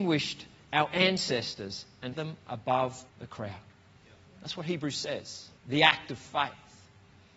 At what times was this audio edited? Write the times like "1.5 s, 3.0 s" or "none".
2.1 s, 3.1 s, 5.6 s